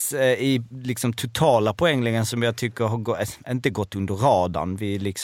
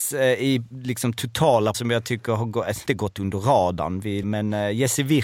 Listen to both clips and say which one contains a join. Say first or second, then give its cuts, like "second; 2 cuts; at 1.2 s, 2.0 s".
second; 3 cuts; at 1.7 s, 2.9 s, 4.2 s